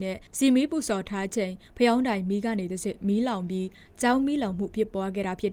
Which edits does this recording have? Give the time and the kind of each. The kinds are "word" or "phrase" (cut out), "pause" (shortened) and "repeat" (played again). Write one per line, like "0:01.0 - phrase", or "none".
none